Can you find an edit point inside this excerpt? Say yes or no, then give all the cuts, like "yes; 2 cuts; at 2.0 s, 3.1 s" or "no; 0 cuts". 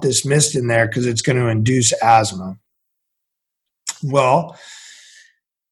no; 0 cuts